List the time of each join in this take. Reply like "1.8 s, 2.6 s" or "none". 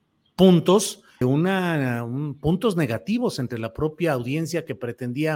1.2 s